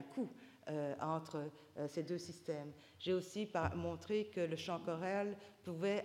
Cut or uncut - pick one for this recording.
uncut